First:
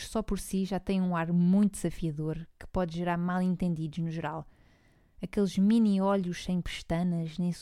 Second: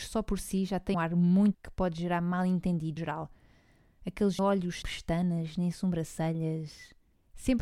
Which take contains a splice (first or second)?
second